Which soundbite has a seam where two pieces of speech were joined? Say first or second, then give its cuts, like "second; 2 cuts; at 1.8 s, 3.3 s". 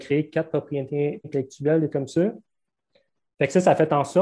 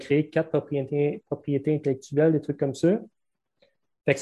first; 2 cuts; at 1.2 s, 1.9 s